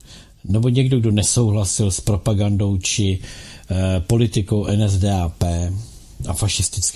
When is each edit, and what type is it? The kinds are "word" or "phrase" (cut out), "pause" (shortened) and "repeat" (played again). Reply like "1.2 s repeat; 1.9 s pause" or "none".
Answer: none